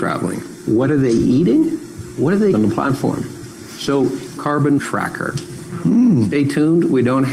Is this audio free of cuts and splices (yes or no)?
no